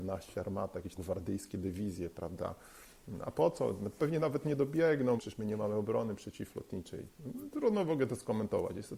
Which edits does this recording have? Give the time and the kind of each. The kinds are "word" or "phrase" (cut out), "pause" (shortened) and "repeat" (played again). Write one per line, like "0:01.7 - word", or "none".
0:01.0 - word
0:05.2 - word